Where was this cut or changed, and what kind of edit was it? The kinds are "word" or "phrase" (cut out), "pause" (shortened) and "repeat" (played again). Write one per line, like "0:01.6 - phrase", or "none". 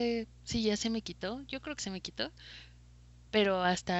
0:01.8 - word